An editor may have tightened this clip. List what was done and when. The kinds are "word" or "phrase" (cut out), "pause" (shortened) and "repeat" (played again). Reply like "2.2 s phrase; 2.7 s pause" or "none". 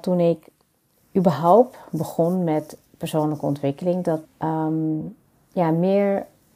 4.2 s phrase